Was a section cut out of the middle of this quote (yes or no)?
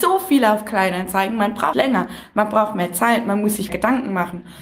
yes